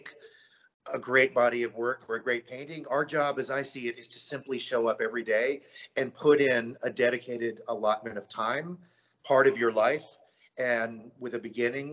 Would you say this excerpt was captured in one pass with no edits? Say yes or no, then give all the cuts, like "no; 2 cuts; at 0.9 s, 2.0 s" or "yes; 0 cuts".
yes; 0 cuts